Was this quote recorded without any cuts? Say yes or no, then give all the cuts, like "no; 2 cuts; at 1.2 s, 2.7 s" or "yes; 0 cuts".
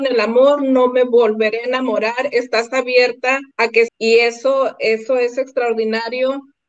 no; 2 cuts; at 3.5 s, 3.9 s